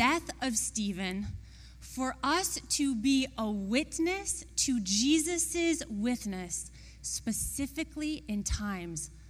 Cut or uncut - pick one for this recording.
uncut